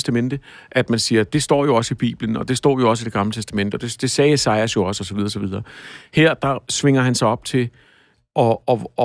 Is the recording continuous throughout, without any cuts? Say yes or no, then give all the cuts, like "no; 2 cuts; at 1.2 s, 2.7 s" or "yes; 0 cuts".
yes; 0 cuts